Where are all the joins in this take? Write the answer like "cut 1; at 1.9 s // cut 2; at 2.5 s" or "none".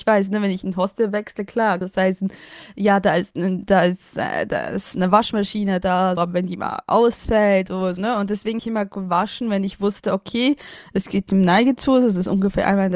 cut 1; at 1.8 s // cut 2; at 6.2 s // cut 3; at 8.0 s // cut 4; at 8.6 s